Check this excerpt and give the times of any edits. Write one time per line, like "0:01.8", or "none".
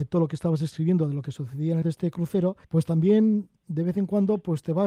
0:01.8
0:02.6